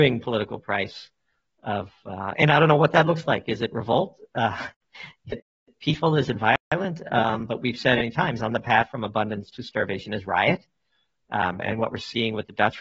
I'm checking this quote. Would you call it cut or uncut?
uncut